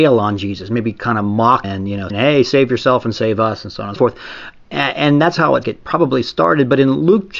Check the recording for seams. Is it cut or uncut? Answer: cut